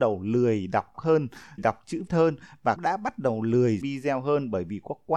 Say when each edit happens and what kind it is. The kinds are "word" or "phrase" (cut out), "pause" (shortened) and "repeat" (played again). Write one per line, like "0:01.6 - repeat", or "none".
0:00.9 - word
0:01.6 - word
0:02.1 - word
0:02.8 - word
0:03.8 - word